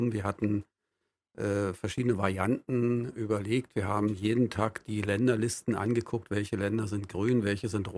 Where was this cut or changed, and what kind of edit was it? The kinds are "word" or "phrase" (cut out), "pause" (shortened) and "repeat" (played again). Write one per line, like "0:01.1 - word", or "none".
none